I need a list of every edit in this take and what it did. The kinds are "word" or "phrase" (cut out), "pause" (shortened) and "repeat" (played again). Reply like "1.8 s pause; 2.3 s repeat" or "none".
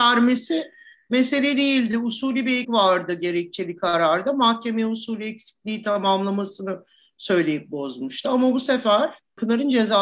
2.6 s word